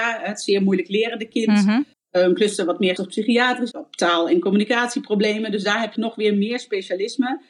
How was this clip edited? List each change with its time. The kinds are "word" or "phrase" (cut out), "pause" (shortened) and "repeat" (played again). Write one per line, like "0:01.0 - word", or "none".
0:01.9 - pause
0:03.0 - phrase
0:03.7 - word
0:06.0 - word